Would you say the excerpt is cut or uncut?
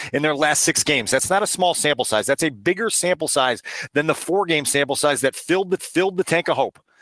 cut